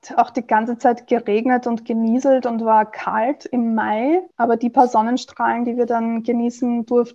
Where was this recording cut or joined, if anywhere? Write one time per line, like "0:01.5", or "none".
0:04.3